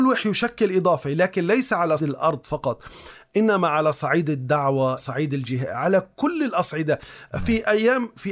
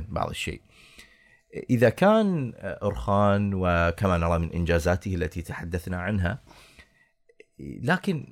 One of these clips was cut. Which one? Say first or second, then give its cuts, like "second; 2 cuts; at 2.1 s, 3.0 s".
first; 2 cuts; at 2.0 s, 5.0 s